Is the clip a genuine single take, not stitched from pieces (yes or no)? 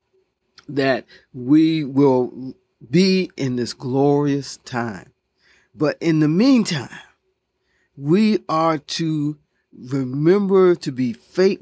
yes